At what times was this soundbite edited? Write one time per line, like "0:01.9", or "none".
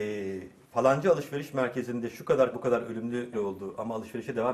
0:02.5
0:03.3